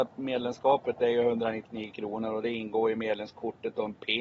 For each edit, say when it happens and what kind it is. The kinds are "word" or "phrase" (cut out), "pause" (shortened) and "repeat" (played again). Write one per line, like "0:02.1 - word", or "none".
none